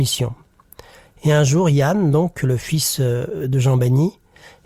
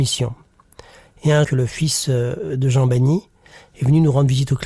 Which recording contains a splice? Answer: second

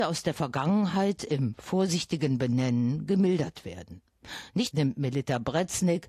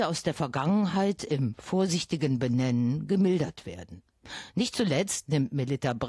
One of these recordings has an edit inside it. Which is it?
first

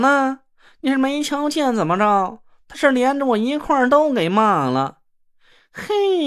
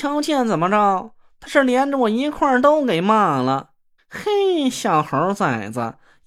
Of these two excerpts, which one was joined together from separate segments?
second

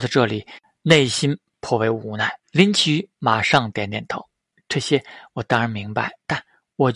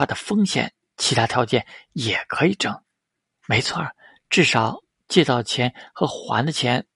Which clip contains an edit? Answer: first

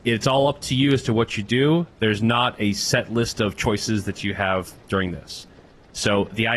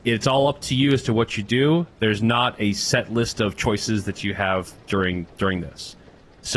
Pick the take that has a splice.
first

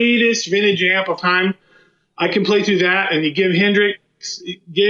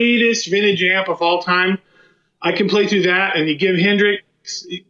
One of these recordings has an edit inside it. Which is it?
first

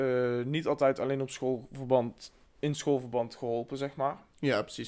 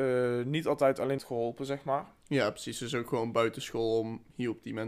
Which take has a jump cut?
second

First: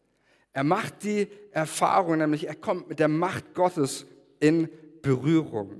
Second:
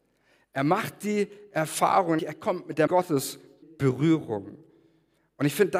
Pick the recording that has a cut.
second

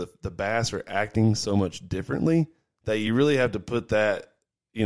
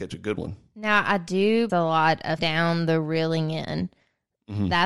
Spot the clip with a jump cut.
second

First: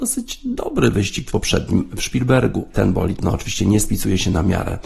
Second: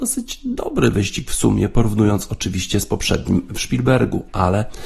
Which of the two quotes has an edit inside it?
first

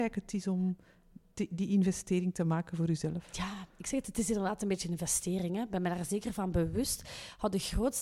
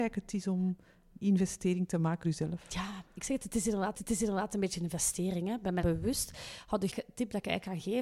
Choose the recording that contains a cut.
second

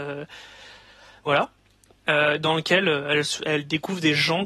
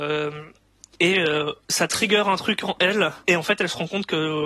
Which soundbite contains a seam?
second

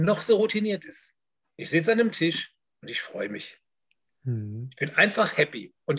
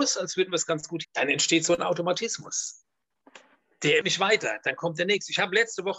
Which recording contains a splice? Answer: second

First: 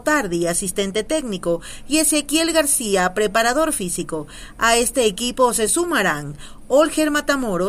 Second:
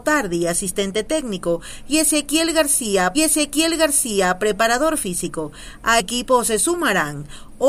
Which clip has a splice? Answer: second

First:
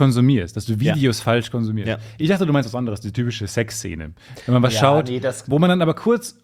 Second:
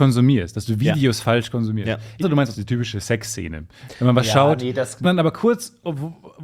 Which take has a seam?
second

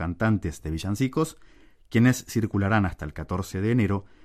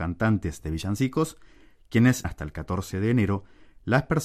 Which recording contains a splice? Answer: second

